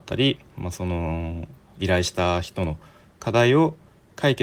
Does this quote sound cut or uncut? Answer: uncut